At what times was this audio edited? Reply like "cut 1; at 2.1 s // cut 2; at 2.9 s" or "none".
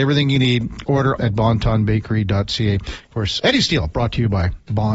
cut 1; at 1.2 s // cut 2; at 3.4 s

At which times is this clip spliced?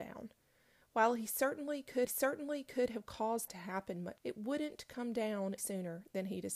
cut 1; at 2.1 s // cut 2; at 3.5 s // cut 3; at 4.2 s // cut 4; at 5.6 s

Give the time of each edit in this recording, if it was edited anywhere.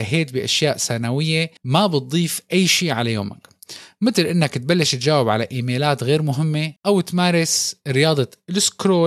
cut 1; at 1.6 s // cut 2; at 6.8 s

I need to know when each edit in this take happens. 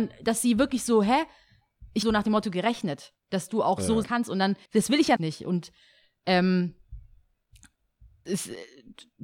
cut 1; at 2.0 s // cut 2; at 4.0 s // cut 3; at 4.6 s // cut 4; at 5.2 s // cut 5; at 8.3 s

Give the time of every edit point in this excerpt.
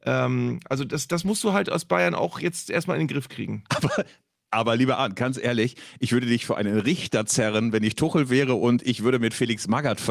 none

